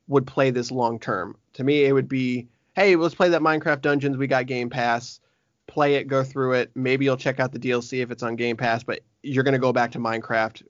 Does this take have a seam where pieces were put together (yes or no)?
no